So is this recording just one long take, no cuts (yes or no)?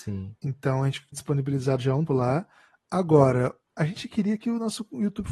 no